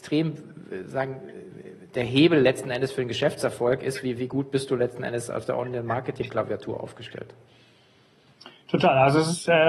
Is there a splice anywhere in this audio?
no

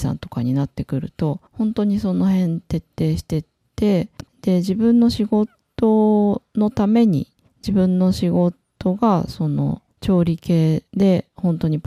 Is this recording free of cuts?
no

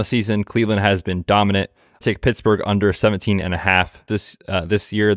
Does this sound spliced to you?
yes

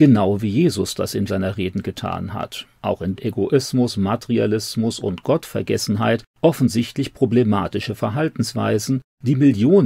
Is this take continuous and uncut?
no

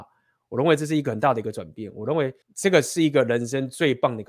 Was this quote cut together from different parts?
yes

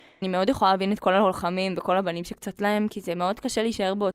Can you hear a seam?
yes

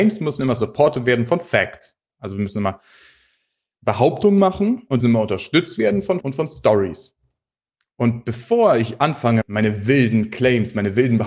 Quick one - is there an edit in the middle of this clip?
yes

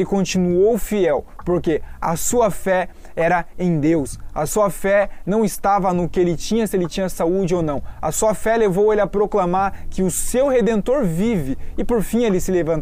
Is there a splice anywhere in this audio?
no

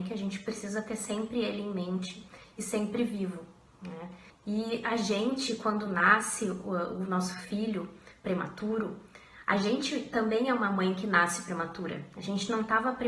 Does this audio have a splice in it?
yes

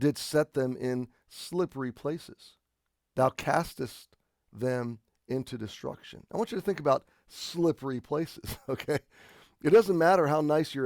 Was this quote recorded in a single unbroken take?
yes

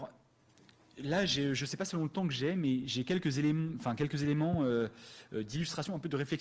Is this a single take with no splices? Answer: yes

